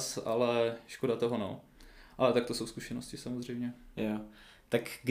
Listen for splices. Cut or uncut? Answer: uncut